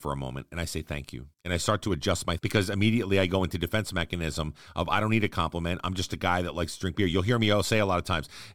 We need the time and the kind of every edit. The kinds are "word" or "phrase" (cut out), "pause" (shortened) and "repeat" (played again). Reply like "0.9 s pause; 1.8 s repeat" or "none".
1.3 s pause; 2.4 s word